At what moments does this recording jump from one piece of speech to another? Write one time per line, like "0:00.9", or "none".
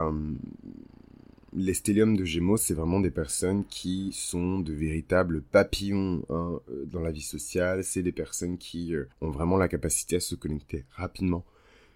0:09.1